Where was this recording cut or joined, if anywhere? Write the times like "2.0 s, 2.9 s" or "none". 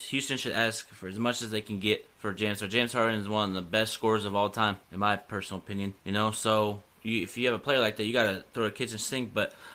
2.1 s, 4.8 s, 6.0 s